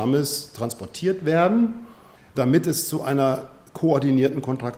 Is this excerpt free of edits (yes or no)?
yes